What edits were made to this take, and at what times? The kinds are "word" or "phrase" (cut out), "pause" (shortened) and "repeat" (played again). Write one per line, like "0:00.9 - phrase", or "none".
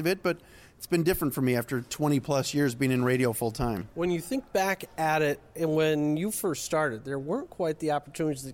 none